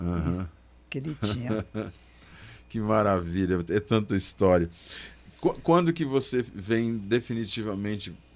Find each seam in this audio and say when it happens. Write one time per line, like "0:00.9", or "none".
none